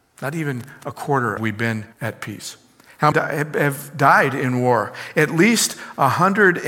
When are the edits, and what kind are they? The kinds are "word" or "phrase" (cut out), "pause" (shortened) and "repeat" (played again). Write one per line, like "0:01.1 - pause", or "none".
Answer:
0:01.4 - phrase
0:01.9 - pause
0:03.1 - phrase

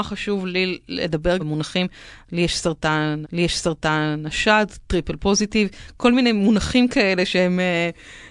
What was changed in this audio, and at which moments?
0:01.4 - word
0:03.2 - repeat

